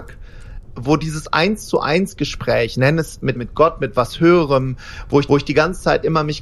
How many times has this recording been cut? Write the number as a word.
two